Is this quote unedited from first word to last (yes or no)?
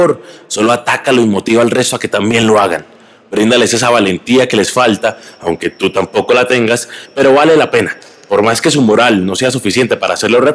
yes